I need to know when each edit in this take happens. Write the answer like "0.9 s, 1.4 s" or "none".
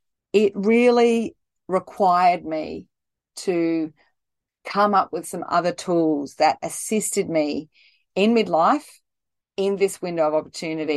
none